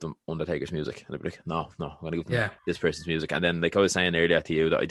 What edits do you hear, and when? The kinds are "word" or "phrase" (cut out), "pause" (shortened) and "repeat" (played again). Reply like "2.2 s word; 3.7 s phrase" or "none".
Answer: 2.6 s pause